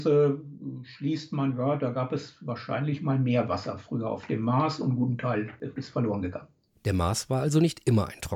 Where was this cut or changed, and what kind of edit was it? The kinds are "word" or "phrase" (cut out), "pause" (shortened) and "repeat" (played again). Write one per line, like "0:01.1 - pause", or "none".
none